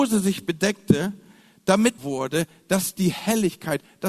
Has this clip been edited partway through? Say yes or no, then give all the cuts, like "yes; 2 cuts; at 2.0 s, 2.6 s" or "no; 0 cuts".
yes; 1 cut; at 2.0 s